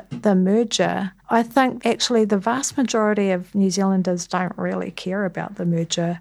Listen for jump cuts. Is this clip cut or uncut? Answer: cut